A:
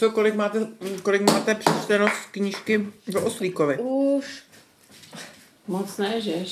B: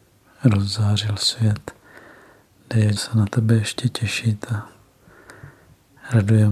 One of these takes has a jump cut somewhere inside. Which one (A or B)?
B